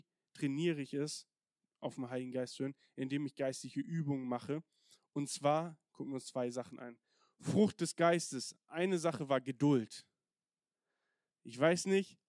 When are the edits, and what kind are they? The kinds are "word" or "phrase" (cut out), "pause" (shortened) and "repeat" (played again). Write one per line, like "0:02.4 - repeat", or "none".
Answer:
none